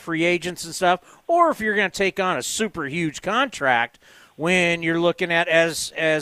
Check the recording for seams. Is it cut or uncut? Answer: uncut